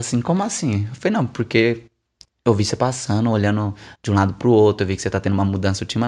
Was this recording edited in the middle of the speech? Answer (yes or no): no